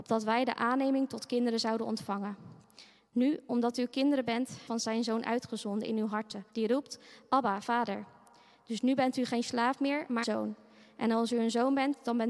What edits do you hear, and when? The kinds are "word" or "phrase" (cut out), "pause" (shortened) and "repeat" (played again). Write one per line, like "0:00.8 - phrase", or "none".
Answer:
0:04.7 - phrase
0:06.5 - pause
0:10.2 - word